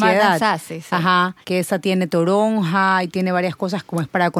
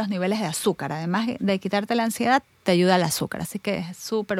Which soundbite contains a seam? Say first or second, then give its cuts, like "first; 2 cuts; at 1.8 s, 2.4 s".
first; 1 cut; at 1.4 s